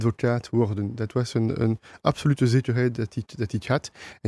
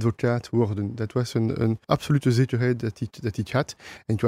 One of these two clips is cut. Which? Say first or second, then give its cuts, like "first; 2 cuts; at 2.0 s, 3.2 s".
second; 1 cut; at 1.8 s